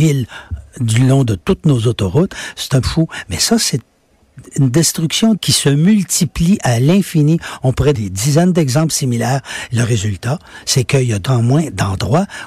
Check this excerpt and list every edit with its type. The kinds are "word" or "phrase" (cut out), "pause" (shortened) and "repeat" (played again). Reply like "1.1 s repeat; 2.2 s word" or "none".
2.8 s word; 5.4 s word; 7.9 s word; 11.3 s word